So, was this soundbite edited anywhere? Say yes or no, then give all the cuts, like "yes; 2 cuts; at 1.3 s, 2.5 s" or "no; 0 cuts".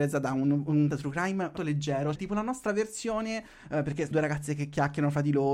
yes; 4 cuts; at 0.9 s, 1.6 s, 2.2 s, 4.1 s